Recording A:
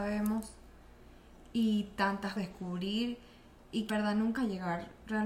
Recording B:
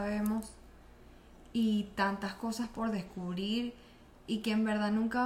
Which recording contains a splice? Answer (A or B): A